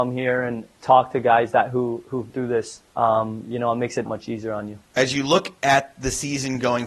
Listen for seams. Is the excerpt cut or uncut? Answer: cut